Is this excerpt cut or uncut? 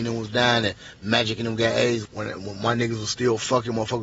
cut